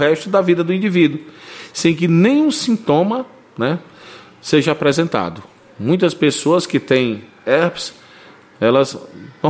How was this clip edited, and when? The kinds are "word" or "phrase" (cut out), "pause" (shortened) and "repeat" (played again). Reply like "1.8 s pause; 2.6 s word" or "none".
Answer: none